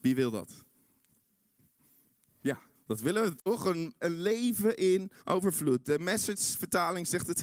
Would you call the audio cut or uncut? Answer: cut